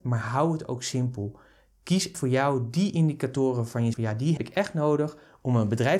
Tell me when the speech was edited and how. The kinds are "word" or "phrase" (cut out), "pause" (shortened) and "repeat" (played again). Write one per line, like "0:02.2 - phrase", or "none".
0:02.1 - word
0:03.9 - word
0:04.4 - word

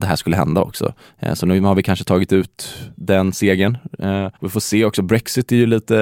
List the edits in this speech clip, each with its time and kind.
0:04.4 - pause

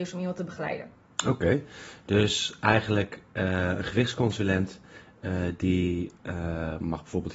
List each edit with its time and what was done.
none

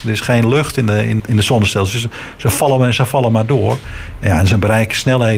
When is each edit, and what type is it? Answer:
0:01.2 - word

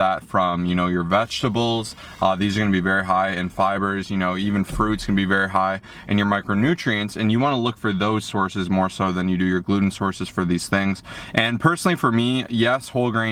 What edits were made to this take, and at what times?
none

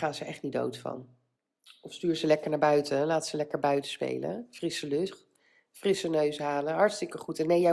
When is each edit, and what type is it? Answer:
0:01.4 - pause

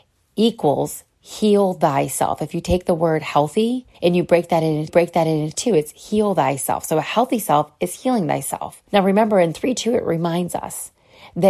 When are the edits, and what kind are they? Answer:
0:03.9 - pause
0:04.9 - repeat
0:08.9 - pause
0:09.8 - word

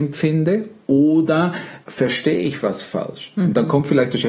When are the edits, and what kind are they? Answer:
0:01.8 - pause

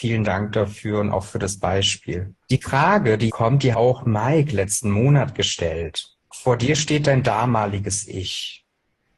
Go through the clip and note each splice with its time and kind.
0:02.4 - pause
0:03.3 - word
0:03.7 - phrase
0:06.2 - pause

